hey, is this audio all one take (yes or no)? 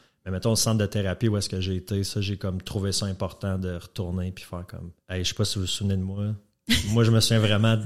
no